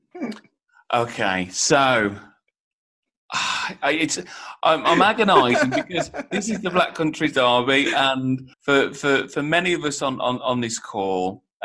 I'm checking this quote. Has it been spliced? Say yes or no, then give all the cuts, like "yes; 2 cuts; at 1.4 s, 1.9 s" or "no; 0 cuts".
yes; 1 cut; at 8.5 s